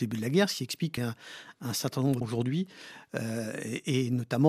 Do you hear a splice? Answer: yes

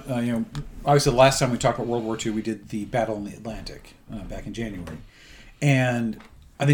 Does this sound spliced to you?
no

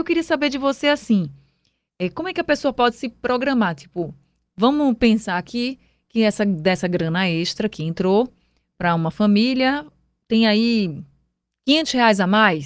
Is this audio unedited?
yes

